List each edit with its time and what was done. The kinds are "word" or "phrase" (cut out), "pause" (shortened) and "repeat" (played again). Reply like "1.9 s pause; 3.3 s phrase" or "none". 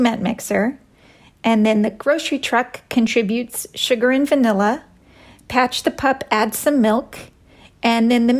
none

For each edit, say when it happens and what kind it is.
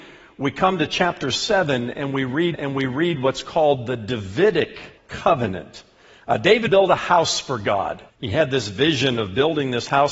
2.5 s repeat; 5.0 s pause; 6.7 s phrase; 8.1 s pause

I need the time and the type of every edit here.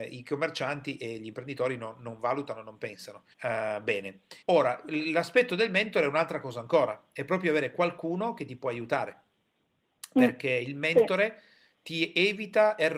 3.3 s pause; 4.4 s pause

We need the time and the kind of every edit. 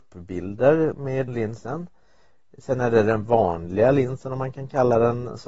1.3 s word

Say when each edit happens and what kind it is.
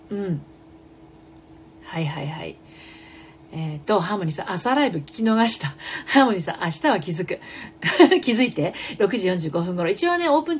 none

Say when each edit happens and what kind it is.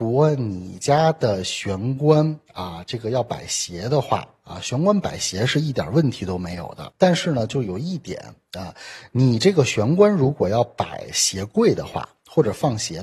2.5 s pause

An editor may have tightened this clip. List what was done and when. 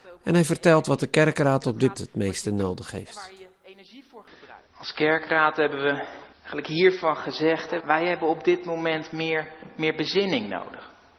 2.0 s word; 4.7 s pause; 6.3 s pause; 7.8 s word

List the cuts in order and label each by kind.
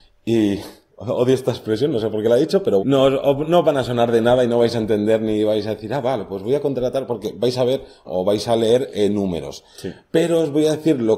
2.8 s word; 8.0 s word

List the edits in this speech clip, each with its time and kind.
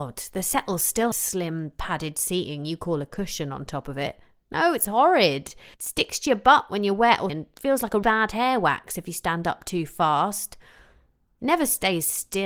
1.1 s phrase; 5.7 s pause; 7.3 s word; 8.0 s word

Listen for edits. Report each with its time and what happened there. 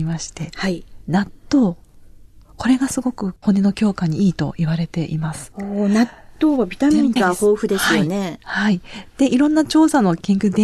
7.2 s word

